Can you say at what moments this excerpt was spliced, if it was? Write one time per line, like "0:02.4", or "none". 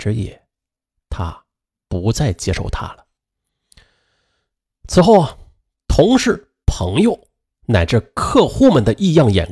none